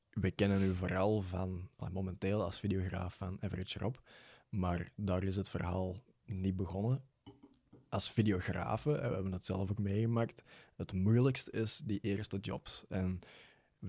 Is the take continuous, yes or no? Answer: yes